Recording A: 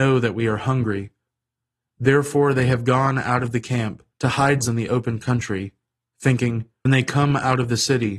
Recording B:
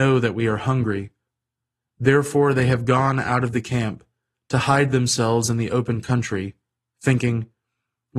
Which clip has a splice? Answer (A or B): A